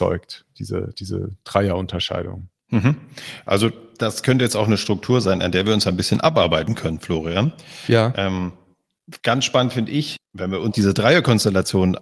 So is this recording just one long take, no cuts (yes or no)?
no